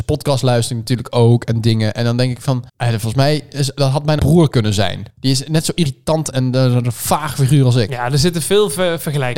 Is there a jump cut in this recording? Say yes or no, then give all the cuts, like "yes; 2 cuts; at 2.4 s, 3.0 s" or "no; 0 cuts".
yes; 4 cuts; at 2.7 s, 4.2 s, 5.1 s, 6.3 s